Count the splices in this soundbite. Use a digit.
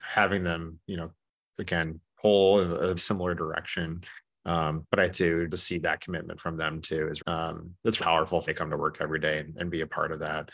6